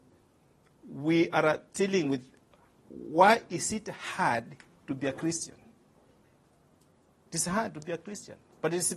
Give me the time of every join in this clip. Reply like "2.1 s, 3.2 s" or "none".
none